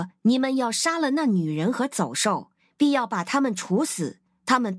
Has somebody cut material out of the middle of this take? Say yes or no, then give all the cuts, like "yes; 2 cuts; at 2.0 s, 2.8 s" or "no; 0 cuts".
no; 0 cuts